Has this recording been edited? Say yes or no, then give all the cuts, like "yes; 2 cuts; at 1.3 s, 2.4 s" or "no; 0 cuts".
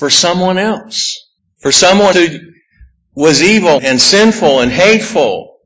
yes; 3 cuts; at 1.4 s, 2.1 s, 3.8 s